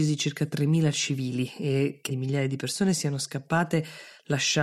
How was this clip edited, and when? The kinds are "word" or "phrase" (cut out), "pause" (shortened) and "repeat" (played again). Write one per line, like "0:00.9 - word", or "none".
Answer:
0:02.1 - word

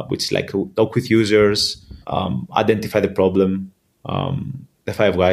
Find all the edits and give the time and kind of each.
0:02.0 - pause

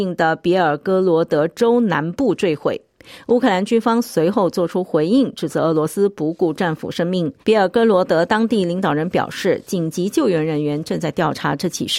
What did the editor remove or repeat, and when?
0:07.4 - pause

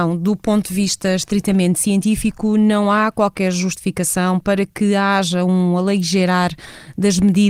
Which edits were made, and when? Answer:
none

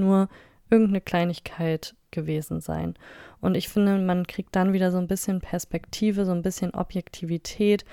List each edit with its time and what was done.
none

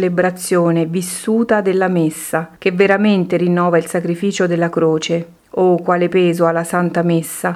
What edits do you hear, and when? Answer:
0:02.6 - pause
0:05.4 - pause

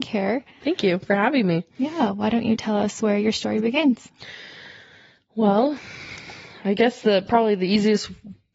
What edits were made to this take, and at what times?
none

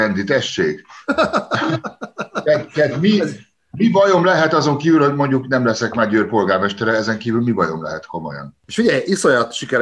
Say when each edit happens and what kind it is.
none

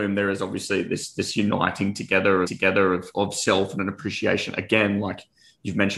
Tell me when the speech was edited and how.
0:02.4 - repeat

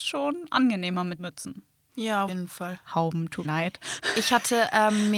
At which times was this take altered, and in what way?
0:01.2 - word
0:02.3 - word
0:03.4 - word

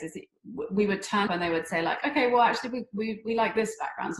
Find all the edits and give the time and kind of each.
0:01.3 - word

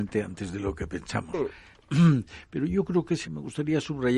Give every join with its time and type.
0:03.2 - word

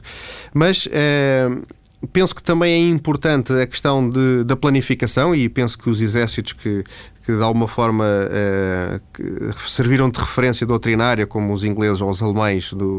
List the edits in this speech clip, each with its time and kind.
0:05.8 - word

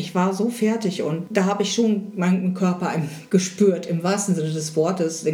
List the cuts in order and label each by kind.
none

